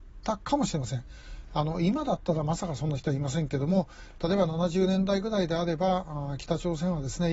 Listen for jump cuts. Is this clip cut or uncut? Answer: uncut